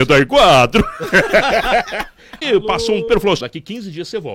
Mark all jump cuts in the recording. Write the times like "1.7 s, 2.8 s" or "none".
2.4 s, 3.1 s, 3.4 s